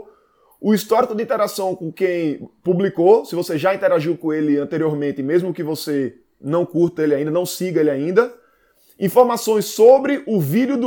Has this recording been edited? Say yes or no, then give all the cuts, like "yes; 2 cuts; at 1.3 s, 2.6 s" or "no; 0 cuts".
no; 0 cuts